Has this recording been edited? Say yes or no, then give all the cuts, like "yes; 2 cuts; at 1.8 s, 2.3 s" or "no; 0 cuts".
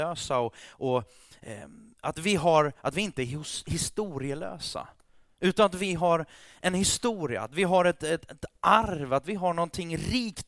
no; 0 cuts